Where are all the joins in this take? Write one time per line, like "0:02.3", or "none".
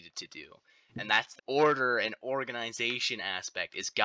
0:01.4